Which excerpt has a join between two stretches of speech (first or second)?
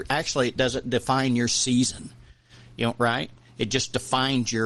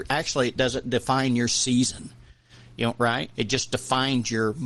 second